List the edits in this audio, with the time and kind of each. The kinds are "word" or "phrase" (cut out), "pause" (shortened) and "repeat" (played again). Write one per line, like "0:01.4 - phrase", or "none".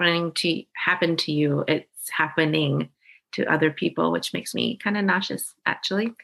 none

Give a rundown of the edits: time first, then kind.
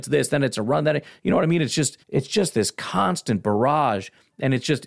0:02.0 - pause

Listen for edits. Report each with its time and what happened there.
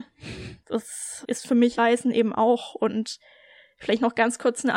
0:01.2 - word
0:01.8 - word

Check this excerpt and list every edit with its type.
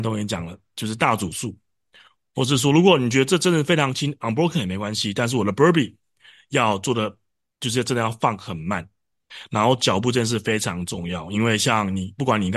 none

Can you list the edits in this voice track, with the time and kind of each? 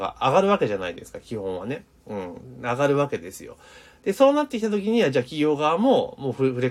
none

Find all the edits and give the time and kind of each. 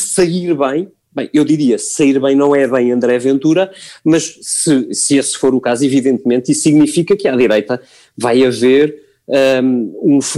none

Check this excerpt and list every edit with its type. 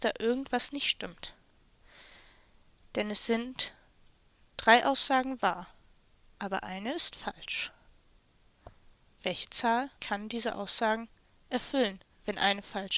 0:10.0 - pause

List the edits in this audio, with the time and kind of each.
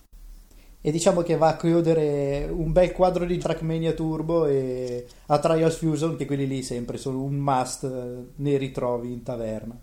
0:03.4 - phrase
0:06.2 - phrase

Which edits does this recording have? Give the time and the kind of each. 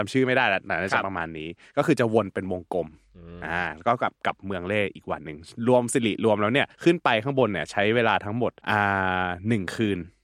0:06.7 - pause
0:08.6 - pause

